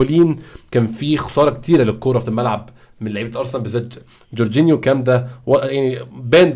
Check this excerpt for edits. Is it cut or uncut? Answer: cut